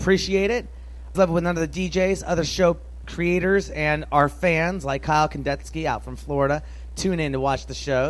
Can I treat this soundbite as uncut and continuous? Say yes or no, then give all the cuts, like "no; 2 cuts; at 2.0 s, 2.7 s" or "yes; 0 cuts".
no; 1 cut; at 1.1 s